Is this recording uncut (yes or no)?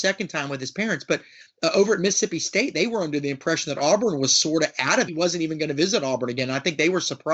no